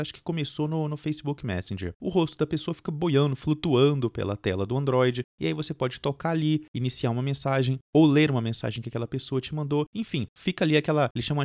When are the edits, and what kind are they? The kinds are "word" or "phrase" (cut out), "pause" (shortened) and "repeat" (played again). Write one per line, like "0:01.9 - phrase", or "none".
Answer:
none